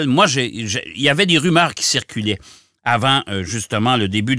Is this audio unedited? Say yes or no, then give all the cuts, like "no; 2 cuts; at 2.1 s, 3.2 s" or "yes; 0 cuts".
yes; 0 cuts